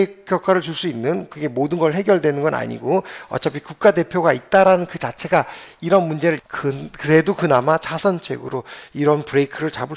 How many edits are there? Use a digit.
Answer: 1